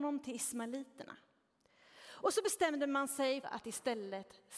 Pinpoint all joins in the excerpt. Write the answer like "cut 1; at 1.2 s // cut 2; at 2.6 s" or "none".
cut 1; at 3.4 s

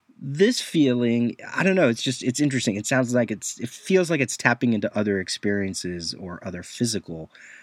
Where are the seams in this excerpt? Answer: none

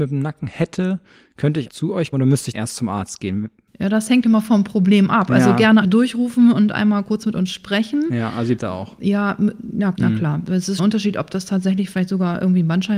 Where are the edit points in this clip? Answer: cut 1; at 1.7 s // cut 2; at 2.1 s // cut 3; at 2.5 s // cut 4; at 4.2 s // cut 5; at 5.8 s // cut 6; at 8.6 s // cut 7; at 9.9 s // cut 8; at 10.8 s

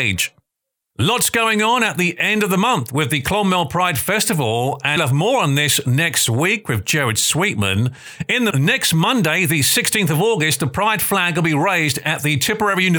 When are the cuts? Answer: cut 1; at 5.0 s // cut 2; at 8.5 s

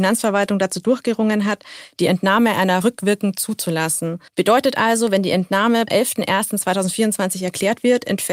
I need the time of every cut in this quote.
cut 1; at 2.8 s // cut 2; at 4.3 s // cut 3; at 5.9 s

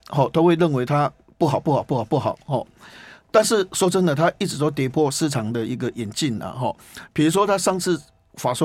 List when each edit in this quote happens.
none

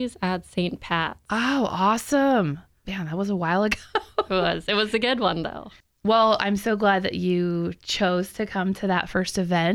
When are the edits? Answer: none

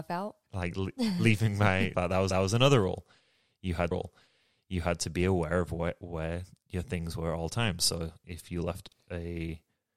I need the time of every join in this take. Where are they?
cut 1; at 1.9 s // cut 2; at 2.3 s // cut 3; at 3.9 s

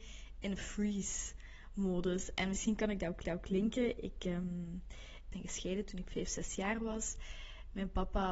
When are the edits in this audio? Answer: cut 1; at 3.2 s // cut 2; at 5.3 s

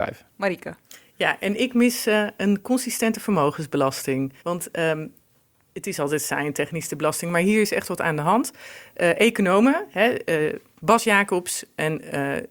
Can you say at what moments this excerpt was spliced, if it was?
cut 1; at 4.4 s

